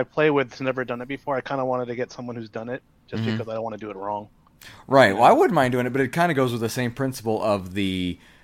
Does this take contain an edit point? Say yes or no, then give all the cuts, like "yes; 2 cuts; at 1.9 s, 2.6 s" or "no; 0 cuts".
no; 0 cuts